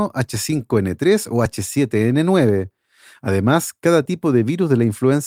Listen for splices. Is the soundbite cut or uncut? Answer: uncut